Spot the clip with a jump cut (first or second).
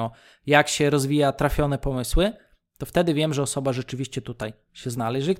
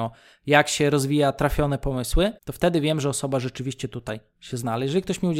second